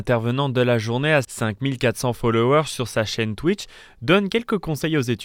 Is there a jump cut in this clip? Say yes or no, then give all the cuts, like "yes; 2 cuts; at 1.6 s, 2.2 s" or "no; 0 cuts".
yes; 1 cut; at 1.2 s